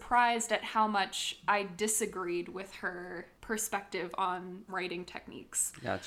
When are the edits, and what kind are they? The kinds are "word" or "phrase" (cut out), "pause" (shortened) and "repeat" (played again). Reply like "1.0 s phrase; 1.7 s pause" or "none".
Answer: 4.7 s word